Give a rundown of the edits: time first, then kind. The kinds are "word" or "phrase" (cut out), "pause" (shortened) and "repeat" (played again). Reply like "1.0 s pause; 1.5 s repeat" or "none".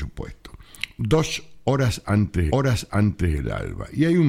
2.5 s repeat